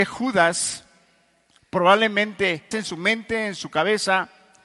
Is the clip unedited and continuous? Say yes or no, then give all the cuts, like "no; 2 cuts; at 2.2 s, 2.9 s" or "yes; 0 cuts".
no; 1 cut; at 2.7 s